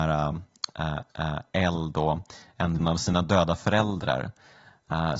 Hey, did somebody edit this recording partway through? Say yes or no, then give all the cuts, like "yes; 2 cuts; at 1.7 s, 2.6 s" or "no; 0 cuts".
yes; 2 cuts; at 1.1 s, 2.8 s